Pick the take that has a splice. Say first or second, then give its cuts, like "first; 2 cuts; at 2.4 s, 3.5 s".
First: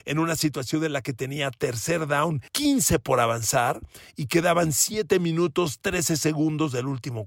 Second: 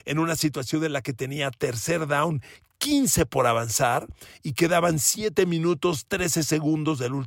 first; 1 cut; at 2.5 s